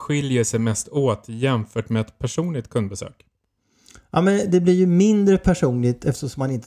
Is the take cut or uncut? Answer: uncut